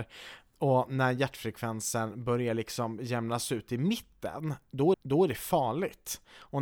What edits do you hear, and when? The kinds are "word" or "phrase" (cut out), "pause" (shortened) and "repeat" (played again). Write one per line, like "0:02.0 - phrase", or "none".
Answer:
0:04.9 - repeat